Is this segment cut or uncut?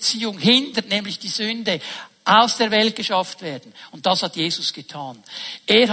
uncut